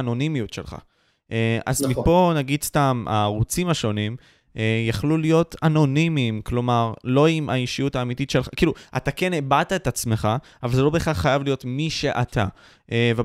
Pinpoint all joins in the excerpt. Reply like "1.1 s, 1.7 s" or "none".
none